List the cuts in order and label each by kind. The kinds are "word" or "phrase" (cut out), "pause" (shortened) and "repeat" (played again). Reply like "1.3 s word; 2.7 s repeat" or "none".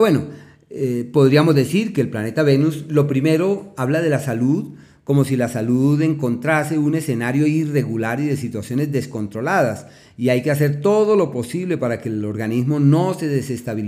none